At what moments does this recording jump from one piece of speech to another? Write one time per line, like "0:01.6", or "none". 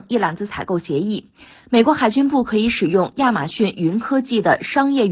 none